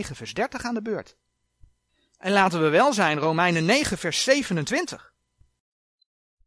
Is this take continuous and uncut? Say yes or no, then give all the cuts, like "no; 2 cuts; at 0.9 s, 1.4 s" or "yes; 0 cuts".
yes; 0 cuts